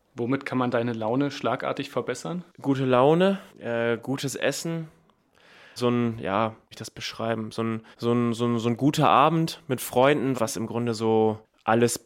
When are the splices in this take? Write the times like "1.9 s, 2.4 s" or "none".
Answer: 2.5 s, 3.5 s, 5.8 s, 6.7 s, 7.9 s, 10.3 s